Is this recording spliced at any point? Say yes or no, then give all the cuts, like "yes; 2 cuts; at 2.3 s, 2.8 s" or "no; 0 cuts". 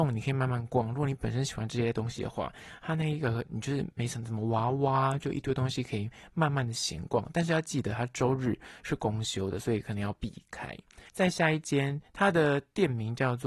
yes; 1 cut; at 11.1 s